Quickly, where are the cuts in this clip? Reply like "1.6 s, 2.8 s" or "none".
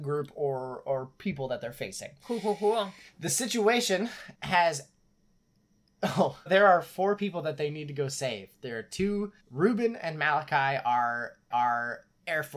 4.3 s, 6.5 s, 9.4 s, 11.5 s